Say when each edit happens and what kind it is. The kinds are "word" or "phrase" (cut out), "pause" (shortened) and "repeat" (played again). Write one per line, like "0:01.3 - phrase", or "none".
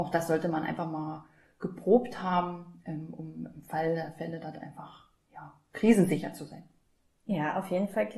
none